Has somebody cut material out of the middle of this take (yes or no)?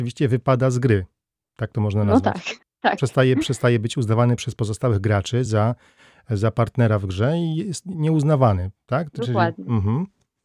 no